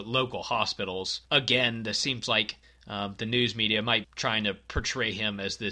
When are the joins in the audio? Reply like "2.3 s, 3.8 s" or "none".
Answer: 1.2 s, 2.6 s, 4.0 s